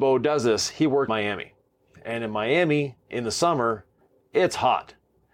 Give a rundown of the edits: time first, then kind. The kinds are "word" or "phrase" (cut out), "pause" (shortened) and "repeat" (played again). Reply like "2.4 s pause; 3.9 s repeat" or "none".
1.1 s word